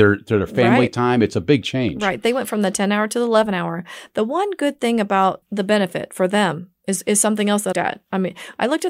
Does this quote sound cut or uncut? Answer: cut